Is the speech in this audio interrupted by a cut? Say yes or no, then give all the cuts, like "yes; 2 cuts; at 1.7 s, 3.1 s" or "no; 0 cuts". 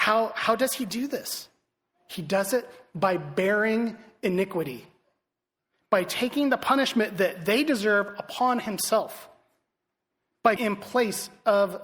yes; 1 cut; at 10.6 s